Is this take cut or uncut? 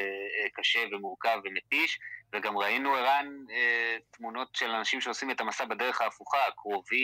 uncut